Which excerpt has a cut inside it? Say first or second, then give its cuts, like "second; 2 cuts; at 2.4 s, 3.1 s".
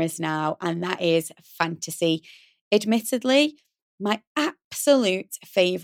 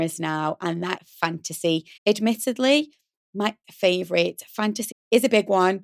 second; 4 cuts; at 1.0 s, 2.0 s, 3.6 s, 4.9 s